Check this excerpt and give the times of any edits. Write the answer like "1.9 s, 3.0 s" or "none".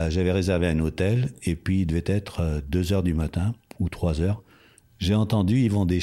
3.6 s